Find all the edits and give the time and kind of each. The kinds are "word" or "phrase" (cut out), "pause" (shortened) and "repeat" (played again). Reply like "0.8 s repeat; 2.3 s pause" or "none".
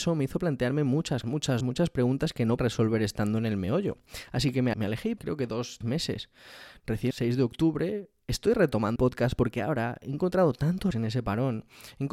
1.2 s word; 1.6 s word; 2.6 s word; 4.7 s word; 5.2 s word; 5.8 s word; 7.1 s word; 9.0 s word; 10.9 s word